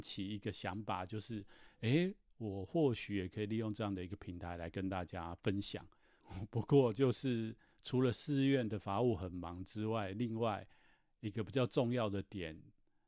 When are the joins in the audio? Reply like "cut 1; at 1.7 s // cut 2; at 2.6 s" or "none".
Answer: none